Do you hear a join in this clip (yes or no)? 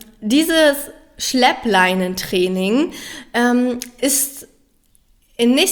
no